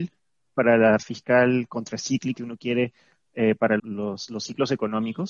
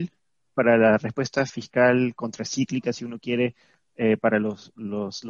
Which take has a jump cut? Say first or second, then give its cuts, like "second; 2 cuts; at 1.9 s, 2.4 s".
first; 3 cuts; at 1.0 s, 2.4 s, 3.8 s